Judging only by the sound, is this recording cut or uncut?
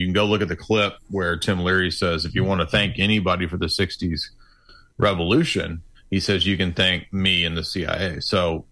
cut